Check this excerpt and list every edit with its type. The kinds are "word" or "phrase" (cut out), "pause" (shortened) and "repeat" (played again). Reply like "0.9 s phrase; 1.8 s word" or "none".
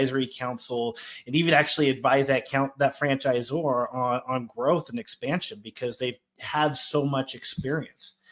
none